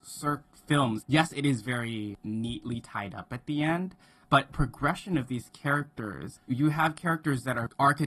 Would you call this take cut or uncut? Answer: cut